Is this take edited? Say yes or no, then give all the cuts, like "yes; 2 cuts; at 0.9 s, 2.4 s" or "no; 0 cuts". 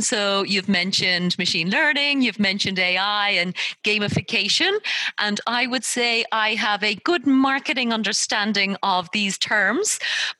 no; 0 cuts